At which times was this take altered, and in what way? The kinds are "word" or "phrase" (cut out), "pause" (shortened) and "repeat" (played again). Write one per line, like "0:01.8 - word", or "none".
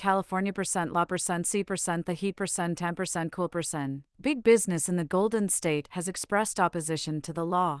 0:04.1 - pause

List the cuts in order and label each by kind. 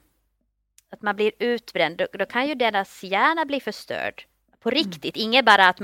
none

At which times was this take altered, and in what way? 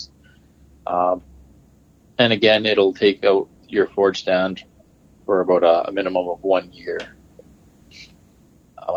none

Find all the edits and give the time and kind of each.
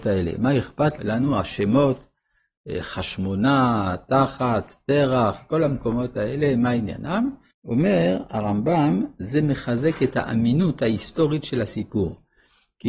0:01.0 - word
0:07.5 - pause

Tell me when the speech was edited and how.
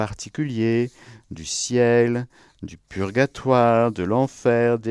none

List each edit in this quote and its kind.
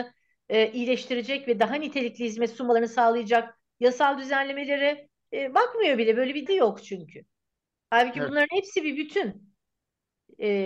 0:05.3 - word
0:06.5 - word

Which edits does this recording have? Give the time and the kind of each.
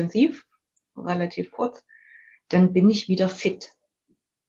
none

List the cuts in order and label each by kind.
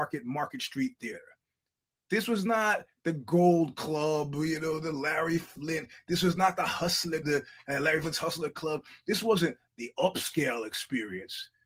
0:07.2 - word

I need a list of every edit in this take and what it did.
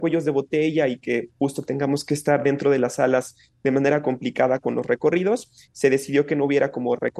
none

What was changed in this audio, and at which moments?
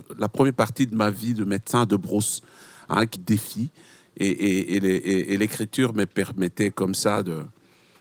0:03.2 - phrase

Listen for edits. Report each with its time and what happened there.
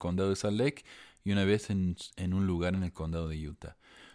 none

